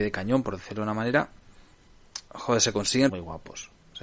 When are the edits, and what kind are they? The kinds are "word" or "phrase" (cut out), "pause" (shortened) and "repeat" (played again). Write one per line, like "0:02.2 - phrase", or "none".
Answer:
0:02.3 - pause
0:03.1 - word

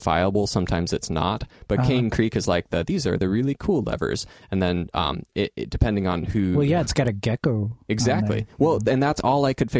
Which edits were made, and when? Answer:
none

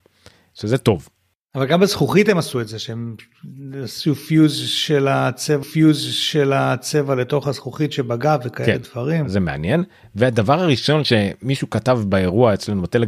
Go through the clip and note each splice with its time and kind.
0:05.6 - repeat

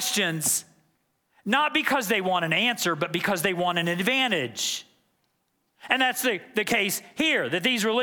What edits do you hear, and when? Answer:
none

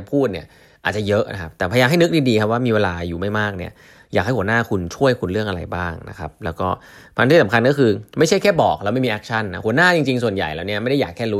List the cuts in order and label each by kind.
none

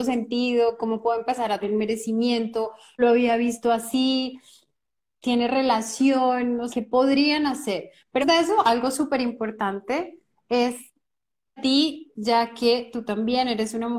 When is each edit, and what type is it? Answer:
0:01.6 - word
0:03.0 - word
0:06.7 - word
0:08.2 - word
0:11.6 - word

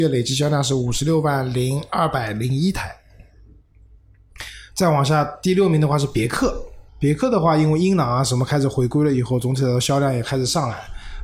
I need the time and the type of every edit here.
0:06.9 - pause

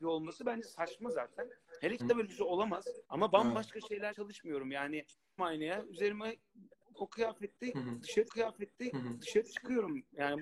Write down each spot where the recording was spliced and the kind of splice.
0:02.0 - word
0:03.0 - pause
0:04.1 - word
0:05.4 - word
0:06.9 - phrase
0:08.3 - repeat

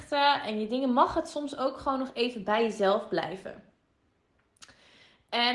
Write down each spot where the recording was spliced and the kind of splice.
none

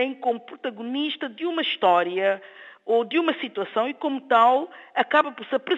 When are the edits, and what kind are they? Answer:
none

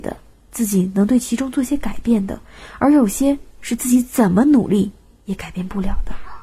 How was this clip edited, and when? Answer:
none

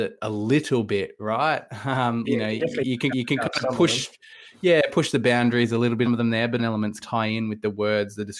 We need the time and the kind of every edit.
0:02.2 - phrase
0:03.1 - repeat
0:06.1 - phrase
0:06.6 - phrase
0:07.0 - word

